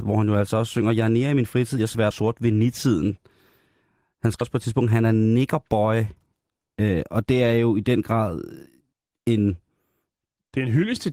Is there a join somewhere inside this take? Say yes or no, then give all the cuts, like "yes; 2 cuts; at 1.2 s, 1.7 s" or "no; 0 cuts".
yes; 3 cuts; at 2.1 s, 4.4 s, 8.9 s